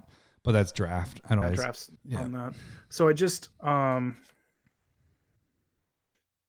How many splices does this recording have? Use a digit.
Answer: 3